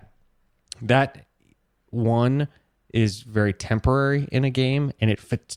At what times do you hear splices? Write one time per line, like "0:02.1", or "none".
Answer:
none